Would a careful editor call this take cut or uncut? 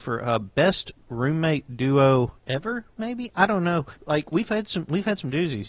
cut